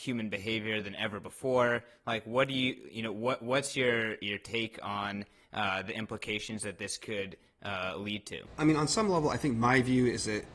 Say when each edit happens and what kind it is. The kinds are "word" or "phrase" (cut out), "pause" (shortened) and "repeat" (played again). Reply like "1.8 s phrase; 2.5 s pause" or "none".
none

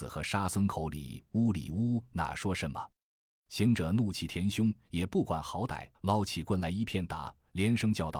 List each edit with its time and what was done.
5.9 s pause

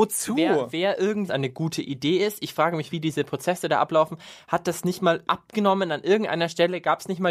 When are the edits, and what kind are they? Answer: 1.3 s phrase; 2.9 s word; 5.2 s word

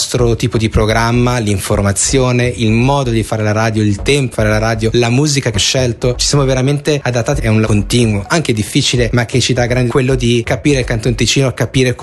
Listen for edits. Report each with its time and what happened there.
4.3 s word; 5.5 s word; 7.6 s word; 9.9 s word

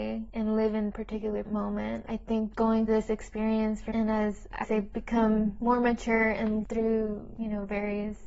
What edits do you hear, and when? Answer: 0.9 s word; 1.4 s word; 2.5 s word; 2.9 s word; 3.9 s word; 4.6 s word; 6.6 s word

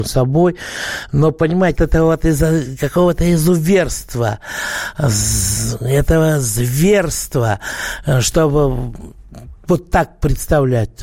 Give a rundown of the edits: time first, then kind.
1.8 s word

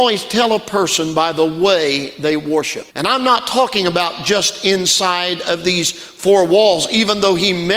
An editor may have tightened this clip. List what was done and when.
2.9 s pause

